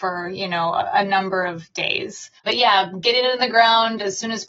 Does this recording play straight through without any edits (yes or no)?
no